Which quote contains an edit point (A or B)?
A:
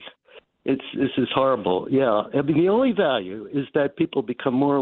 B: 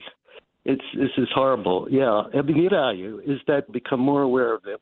B